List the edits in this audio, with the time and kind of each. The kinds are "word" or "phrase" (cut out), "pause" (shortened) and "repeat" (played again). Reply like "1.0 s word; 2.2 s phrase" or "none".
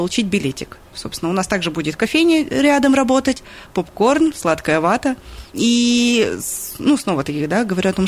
5.5 s pause